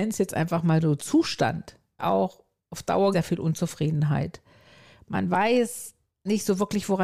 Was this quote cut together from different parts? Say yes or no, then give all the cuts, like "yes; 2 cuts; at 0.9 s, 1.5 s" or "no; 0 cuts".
yes; 3 cuts; at 1.0 s, 2.0 s, 3.1 s